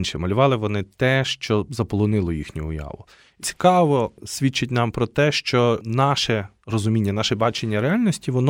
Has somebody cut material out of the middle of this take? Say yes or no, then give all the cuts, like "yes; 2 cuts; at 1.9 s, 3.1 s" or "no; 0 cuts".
yes; 1 cut; at 3.4 s